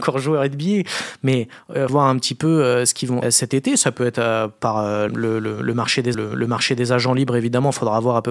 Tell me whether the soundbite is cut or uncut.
cut